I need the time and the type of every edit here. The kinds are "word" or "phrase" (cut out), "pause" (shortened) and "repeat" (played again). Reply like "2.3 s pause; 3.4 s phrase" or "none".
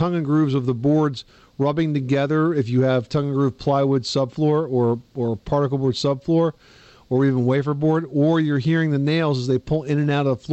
none